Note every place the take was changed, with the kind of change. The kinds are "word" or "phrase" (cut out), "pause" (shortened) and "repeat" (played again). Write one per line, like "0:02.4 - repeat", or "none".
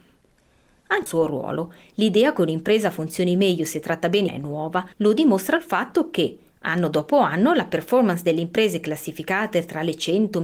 0:01.1 - phrase
0:04.3 - phrase
0:04.9 - pause